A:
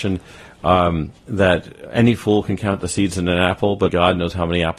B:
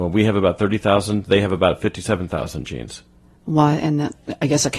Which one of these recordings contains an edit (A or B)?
A